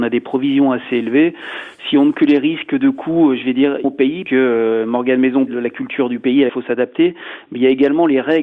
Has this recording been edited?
yes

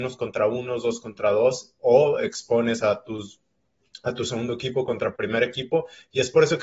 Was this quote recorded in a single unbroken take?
yes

